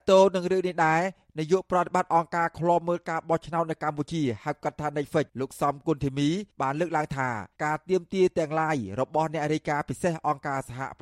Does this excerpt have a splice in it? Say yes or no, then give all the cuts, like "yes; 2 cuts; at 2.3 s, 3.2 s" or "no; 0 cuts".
yes; 3 cuts; at 5.3 s, 6.5 s, 7.5 s